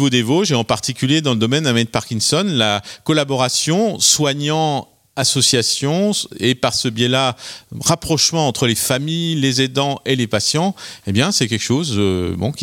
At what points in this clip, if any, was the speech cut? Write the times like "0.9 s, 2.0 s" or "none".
none